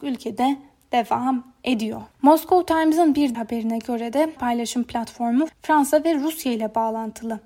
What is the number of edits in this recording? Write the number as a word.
four